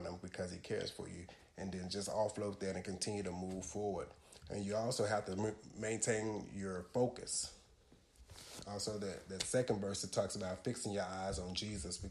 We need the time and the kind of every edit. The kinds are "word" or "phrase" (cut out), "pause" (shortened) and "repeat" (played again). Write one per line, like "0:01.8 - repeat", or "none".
none